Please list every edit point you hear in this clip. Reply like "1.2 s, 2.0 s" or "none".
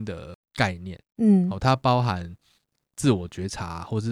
none